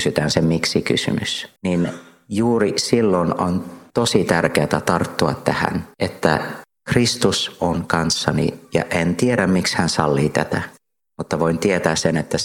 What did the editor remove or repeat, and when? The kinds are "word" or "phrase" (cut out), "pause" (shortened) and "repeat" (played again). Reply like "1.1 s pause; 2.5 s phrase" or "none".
1.6 s pause